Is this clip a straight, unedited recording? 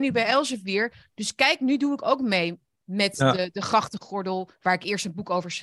yes; 0 cuts

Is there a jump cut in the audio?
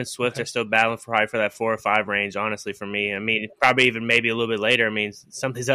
no; 0 cuts

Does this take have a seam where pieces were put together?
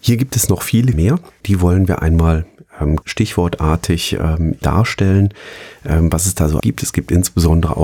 yes; 5 cuts; at 0.9 s, 1.4 s, 3.0 s, 4.6 s, 6.6 s

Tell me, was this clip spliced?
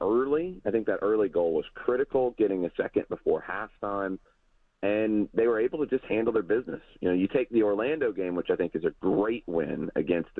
no; 0 cuts

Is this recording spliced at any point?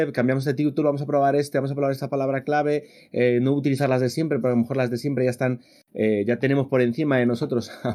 no; 0 cuts

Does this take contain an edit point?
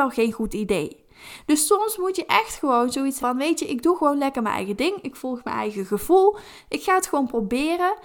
yes; 1 cut; at 3.2 s

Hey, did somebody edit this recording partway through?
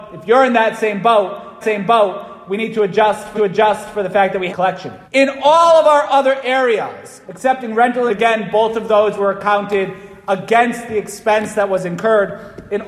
yes; 6 cuts; at 1.6 s, 3.3 s, 4.5 s, 5.1 s, 7.2 s, 8.1 s

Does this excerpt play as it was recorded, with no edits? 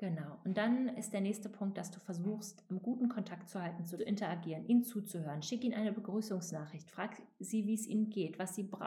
no; 2 cuts; at 1.0 s, 4.0 s

